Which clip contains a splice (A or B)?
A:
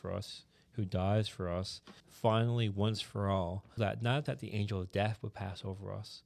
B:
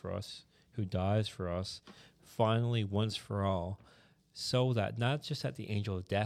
A